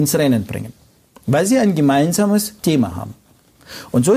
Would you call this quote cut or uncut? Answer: cut